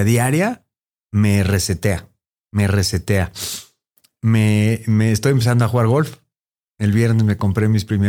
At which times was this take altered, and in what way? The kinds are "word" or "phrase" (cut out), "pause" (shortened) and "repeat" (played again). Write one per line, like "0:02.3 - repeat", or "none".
none